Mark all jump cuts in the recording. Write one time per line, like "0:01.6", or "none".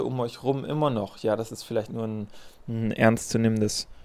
none